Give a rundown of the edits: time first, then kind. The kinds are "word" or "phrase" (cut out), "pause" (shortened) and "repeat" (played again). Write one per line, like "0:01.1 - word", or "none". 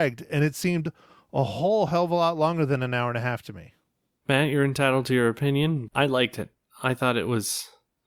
0:05.9 - word